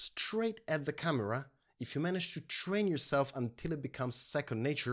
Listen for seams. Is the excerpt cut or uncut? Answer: uncut